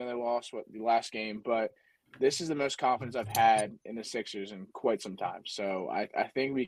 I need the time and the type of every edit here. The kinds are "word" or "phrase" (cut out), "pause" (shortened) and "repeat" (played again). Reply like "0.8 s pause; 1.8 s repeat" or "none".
none